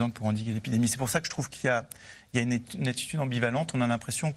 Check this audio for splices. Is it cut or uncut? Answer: uncut